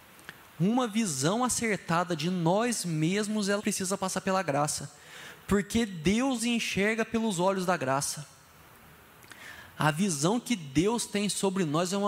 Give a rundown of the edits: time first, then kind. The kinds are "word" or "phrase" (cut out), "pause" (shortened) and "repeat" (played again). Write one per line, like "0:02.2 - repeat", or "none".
0:03.6 - word
0:06.4 - word